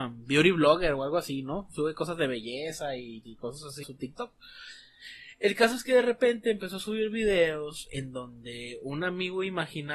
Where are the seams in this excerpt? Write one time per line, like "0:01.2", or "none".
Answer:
0:03.2
0:03.8

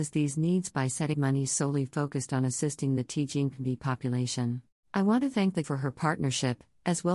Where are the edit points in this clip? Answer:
0:01.1
0:04.8
0:05.6

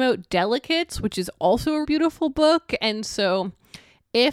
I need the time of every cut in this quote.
0:01.8

